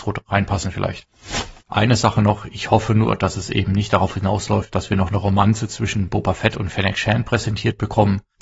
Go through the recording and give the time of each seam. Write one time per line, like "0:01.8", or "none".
0:01.6